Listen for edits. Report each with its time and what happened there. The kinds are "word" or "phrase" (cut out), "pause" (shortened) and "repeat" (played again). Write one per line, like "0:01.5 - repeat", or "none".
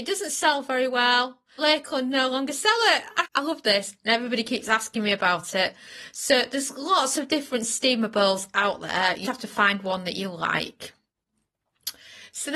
0:01.6 - word
0:03.2 - word
0:09.2 - word